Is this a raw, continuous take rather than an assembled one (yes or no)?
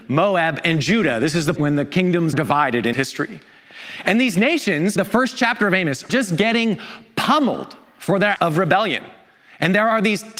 no